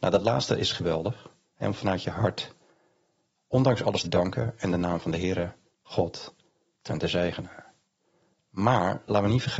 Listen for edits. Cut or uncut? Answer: cut